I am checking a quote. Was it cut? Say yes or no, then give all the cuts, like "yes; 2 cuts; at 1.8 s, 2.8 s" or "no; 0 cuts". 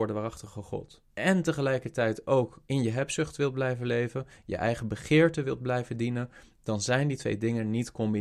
yes; 2 cuts; at 1.1 s, 2.6 s